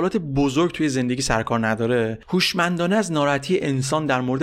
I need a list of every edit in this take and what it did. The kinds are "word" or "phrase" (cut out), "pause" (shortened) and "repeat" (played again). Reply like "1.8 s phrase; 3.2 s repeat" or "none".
none